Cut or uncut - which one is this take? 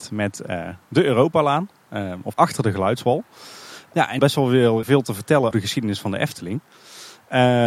cut